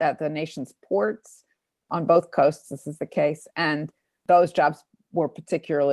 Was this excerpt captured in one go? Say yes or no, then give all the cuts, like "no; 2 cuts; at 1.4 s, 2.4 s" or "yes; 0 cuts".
yes; 0 cuts